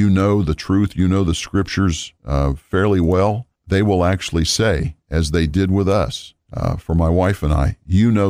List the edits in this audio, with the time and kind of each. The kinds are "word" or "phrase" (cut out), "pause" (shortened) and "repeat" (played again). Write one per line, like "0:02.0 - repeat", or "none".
0:02.2 - pause
0:03.6 - pause
0:06.4 - pause